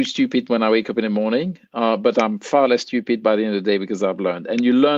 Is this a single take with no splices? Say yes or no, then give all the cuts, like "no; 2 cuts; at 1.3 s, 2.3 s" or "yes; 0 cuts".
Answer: yes; 0 cuts